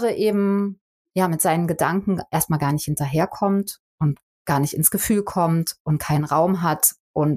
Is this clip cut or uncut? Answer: uncut